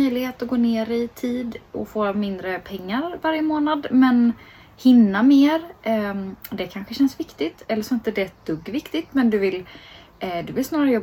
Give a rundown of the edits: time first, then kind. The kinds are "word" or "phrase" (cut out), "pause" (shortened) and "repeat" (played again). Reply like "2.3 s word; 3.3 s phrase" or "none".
none